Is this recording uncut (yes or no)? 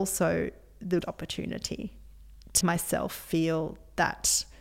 no